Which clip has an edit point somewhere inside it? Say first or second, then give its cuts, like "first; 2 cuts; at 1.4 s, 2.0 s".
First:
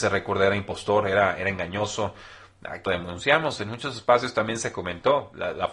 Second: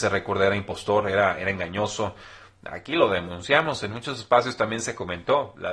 first; 1 cut; at 2.9 s